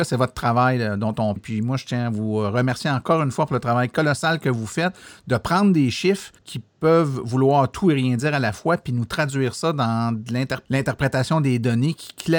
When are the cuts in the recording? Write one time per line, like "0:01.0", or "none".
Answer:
0:01.4
0:06.4
0:10.7